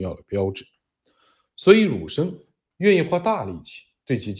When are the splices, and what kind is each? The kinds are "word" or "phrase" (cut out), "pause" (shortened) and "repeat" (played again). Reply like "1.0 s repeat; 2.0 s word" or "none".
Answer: none